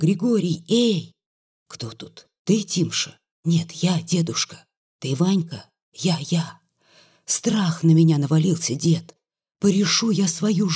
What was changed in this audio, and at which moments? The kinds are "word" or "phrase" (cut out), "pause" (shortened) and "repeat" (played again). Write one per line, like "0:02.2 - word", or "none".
none

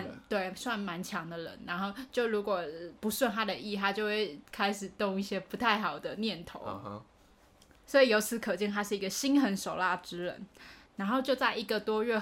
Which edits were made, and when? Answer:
0:04.4 - pause

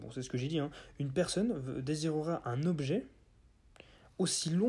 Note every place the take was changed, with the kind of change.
none

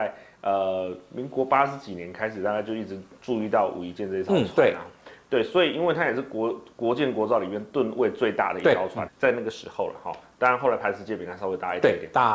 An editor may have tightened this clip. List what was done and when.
0:09.1 - word

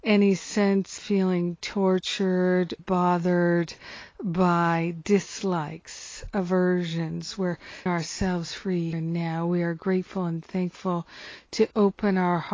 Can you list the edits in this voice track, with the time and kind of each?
0:01.0 - word
0:02.8 - word
0:07.9 - word
0:08.9 - word

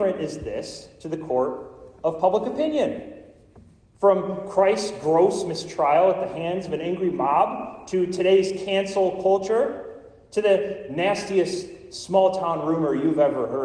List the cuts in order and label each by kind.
none

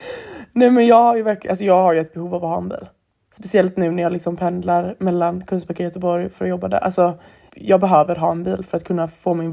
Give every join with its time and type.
0:07.5 - word

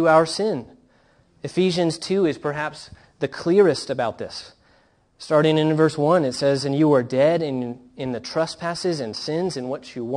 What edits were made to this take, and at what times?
none

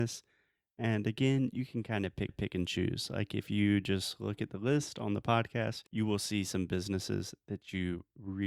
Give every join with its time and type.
0:02.3 - repeat
0:05.9 - pause

